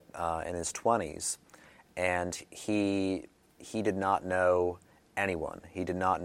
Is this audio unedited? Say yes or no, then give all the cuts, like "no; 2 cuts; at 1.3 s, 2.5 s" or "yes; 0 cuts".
yes; 0 cuts